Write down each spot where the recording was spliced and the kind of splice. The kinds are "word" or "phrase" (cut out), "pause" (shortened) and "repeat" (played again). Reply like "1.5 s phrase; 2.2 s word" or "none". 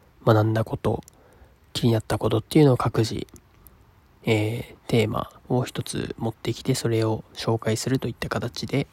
5.4 s pause